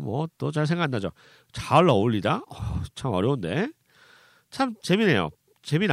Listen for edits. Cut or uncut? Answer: uncut